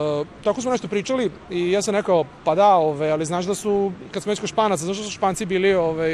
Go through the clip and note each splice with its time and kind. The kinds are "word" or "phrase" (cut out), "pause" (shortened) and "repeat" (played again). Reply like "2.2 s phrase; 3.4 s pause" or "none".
none